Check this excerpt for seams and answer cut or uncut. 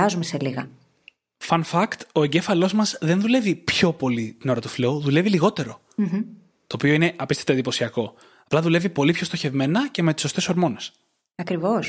uncut